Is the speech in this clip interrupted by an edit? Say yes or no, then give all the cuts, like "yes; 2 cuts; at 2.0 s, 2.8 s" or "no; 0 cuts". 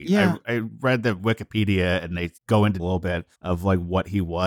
yes; 3 cuts; at 2.4 s, 2.8 s, 3.3 s